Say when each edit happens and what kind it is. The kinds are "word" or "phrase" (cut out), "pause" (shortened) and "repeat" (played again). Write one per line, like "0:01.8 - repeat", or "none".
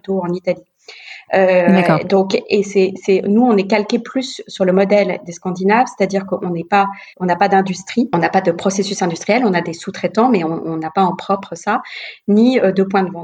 0:07.1 - pause